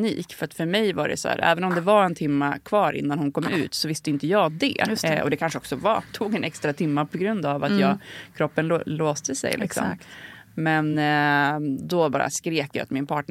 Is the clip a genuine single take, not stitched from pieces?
yes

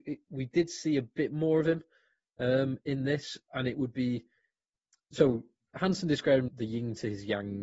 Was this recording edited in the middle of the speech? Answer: yes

